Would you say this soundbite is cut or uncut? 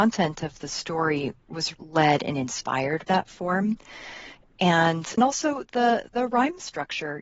cut